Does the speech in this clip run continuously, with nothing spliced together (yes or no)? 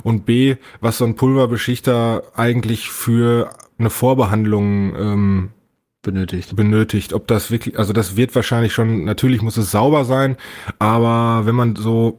yes